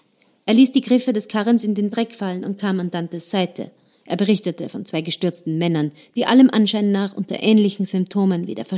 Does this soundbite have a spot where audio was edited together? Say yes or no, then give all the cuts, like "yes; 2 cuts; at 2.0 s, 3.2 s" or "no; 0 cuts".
no; 0 cuts